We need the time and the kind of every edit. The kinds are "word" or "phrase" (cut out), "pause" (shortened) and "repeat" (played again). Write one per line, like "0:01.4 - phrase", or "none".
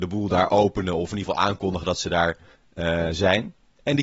0:02.5 - pause